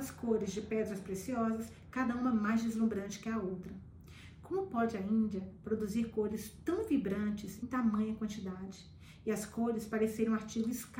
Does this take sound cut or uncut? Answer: cut